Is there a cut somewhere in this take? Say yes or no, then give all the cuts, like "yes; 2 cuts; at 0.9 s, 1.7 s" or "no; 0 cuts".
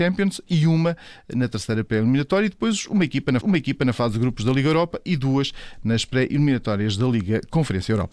yes; 1 cut; at 3.4 s